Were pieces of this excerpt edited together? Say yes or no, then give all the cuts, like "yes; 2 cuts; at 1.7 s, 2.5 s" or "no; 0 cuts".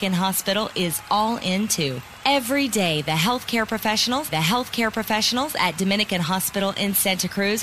yes; 1 cut; at 4.3 s